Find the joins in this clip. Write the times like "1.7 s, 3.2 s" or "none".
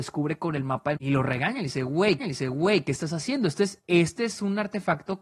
1.0 s, 2.2 s